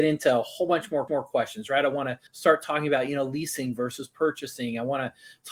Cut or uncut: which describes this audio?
cut